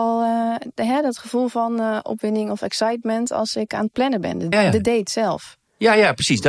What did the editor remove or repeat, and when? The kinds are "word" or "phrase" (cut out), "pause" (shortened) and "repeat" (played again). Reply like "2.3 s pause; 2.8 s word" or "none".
4.5 s word